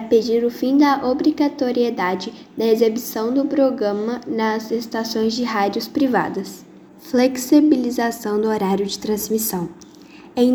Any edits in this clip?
yes; 1 cut; at 6.9 s

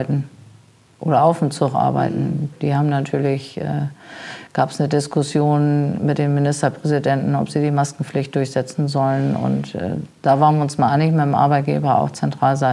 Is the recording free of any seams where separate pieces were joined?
no; 1 cut; at 10.1 s

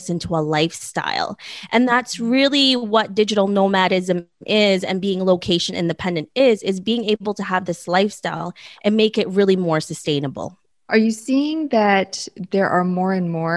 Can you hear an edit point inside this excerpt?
no; 0 cuts

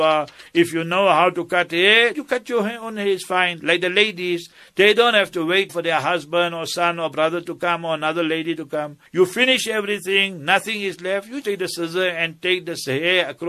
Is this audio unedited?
no; 4 cuts; at 2.1 s, 5.7 s, 9.1 s, 11.4 s

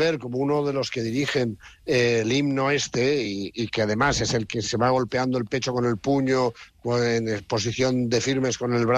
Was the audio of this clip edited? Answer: no; 0 cuts

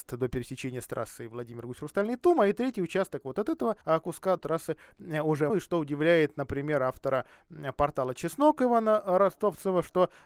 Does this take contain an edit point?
yes; 3 cuts; at 3.8 s, 4.4 s, 5.5 s

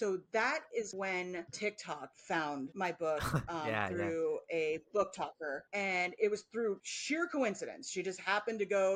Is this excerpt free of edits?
yes; 0 cuts

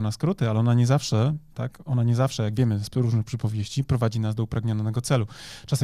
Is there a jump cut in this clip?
no; 0 cuts

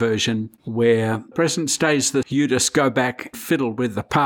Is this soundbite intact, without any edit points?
no; 3 cuts; at 1.3 s, 2.2 s, 3.3 s

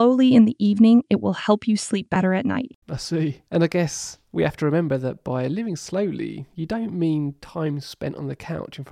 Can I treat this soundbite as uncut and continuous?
no; 2 cuts; at 2.8 s, 3.5 s

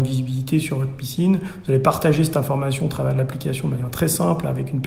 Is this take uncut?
yes; 0 cuts

